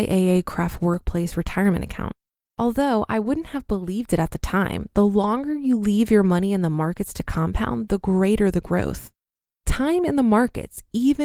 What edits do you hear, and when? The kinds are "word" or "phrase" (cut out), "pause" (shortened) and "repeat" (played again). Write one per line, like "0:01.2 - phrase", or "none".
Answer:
none